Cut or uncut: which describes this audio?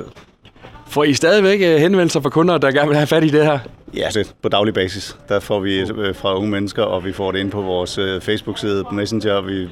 cut